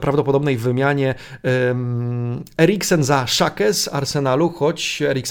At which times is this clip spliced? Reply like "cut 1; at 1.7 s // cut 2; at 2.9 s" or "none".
none